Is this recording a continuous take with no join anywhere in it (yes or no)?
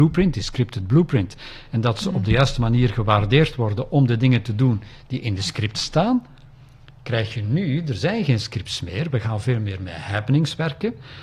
yes